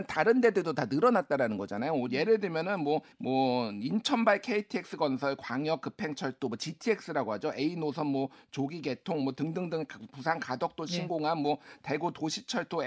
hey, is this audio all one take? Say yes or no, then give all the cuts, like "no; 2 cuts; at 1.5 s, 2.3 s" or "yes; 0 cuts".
no; 1 cut; at 3.1 s